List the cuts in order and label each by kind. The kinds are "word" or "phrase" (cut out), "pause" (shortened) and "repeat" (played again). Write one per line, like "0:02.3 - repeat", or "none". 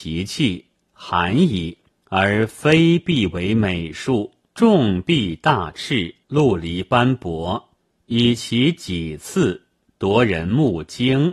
0:01.9 - pause
0:04.4 - pause
0:06.2 - pause
0:07.8 - pause